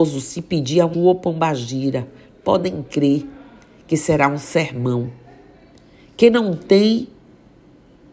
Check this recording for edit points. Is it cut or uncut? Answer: cut